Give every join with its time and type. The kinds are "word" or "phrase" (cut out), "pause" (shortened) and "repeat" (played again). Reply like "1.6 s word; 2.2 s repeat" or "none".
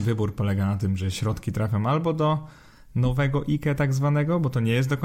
none